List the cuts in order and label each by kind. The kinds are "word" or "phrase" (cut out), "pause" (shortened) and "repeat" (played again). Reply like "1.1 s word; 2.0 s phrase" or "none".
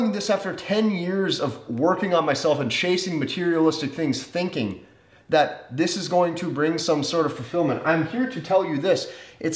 none